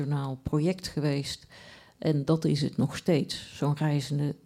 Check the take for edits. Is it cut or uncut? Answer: uncut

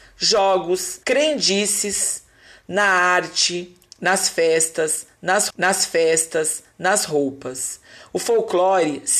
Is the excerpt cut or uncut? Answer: cut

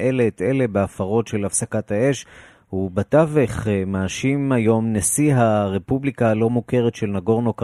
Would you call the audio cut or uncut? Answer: uncut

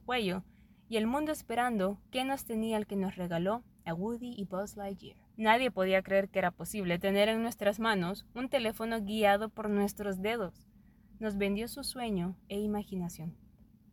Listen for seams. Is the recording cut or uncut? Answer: cut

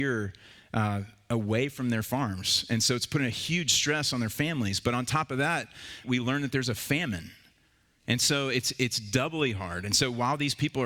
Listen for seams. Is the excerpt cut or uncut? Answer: cut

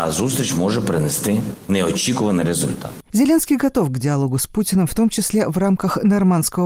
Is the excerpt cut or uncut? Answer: cut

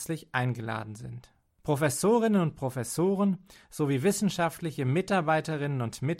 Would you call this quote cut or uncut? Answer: uncut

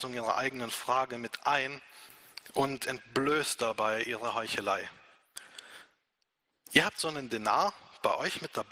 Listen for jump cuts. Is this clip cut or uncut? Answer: uncut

